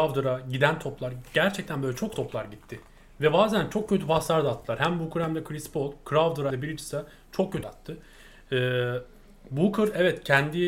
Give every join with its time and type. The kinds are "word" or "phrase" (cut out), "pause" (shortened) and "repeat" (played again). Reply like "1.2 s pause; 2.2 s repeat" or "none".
2.1 s word; 6.5 s word; 7.6 s word